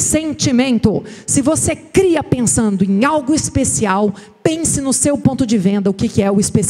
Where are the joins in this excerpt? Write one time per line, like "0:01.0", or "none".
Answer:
none